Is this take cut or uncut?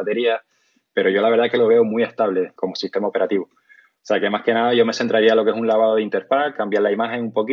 uncut